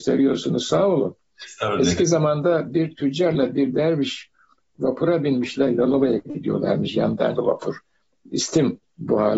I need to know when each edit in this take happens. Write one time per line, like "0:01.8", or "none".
0:07.4